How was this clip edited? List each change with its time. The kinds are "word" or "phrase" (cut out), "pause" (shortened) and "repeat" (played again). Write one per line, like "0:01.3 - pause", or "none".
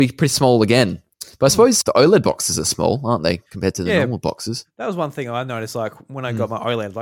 0:01.8 - word

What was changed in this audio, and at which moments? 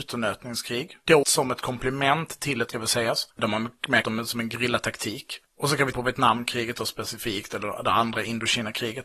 0:01.2 - word
0:02.7 - phrase
0:04.0 - phrase
0:05.9 - word

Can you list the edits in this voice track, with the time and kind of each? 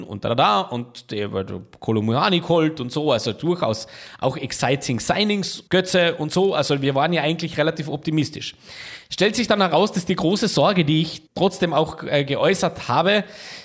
0:05.7 - pause
0:11.3 - pause

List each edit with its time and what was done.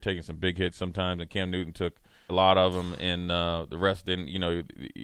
0:02.3 - word

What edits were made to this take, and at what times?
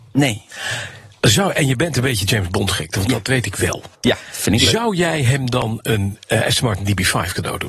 0:03.9 - pause

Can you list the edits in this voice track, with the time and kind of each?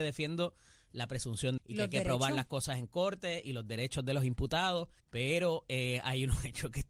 0:01.6 - word
0:05.0 - pause

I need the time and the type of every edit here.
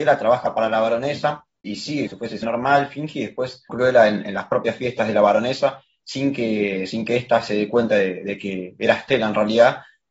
0:01.6 - word
0:02.1 - word
0:02.4 - word
0:03.7 - phrase

